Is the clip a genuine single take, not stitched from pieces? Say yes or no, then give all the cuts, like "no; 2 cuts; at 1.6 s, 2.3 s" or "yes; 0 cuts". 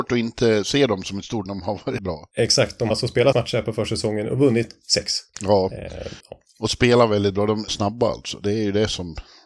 no; 6 cuts; at 1.5 s, 2.0 s, 2.9 s, 3.3 s, 6.2 s, 7.7 s